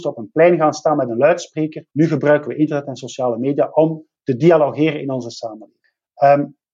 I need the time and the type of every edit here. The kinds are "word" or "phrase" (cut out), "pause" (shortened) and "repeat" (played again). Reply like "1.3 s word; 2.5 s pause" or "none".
1.9 s pause

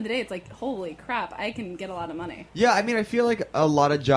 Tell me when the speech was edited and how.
none

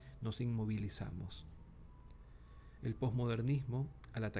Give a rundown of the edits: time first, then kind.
none

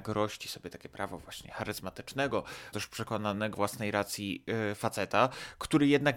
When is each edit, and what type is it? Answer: 2.7 s word; 3.5 s word

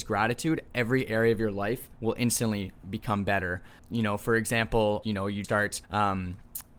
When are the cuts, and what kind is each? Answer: 1.9 s pause; 3.8 s word; 5.0 s word; 5.4 s word; 5.8 s pause

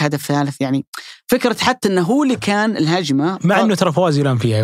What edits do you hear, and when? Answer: none

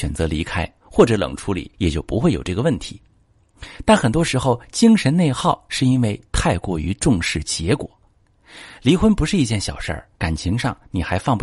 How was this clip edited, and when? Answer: 1.7 s pause; 10.1 s pause

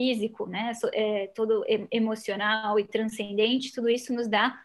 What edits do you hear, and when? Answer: none

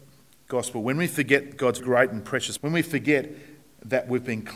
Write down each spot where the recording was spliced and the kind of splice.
1.8 s word; 2.6 s word

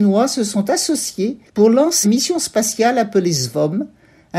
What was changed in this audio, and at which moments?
1.5 s pause; 2.0 s word

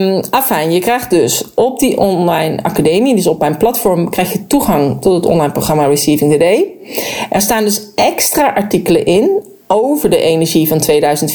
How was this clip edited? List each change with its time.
none

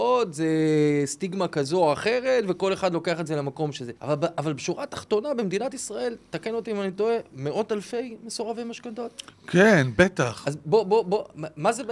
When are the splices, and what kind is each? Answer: 4.0 s pause

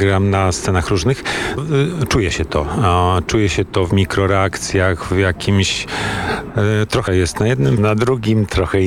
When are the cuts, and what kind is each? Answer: 1.6 s word; 3.9 s word; 7.1 s phrase; 7.8 s phrase

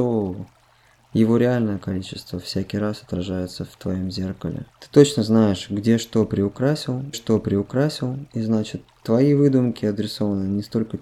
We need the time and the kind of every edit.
4.7 s pause; 7.1 s repeat

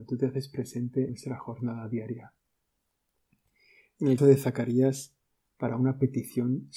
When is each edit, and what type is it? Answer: 1.1 s word; 4.2 s word

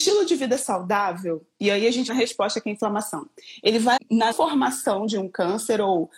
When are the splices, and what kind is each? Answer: 2.1 s phrase; 4.0 s word; 4.3 s word

